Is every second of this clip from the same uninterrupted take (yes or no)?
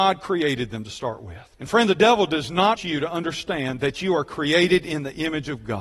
no